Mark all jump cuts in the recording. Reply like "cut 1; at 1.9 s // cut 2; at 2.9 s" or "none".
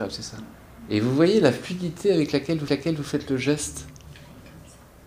cut 1; at 2.7 s